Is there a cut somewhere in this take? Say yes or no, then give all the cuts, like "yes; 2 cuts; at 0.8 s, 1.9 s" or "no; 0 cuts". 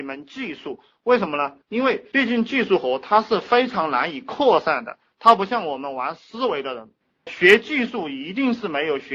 yes; 2 cuts; at 1.6 s, 7.3 s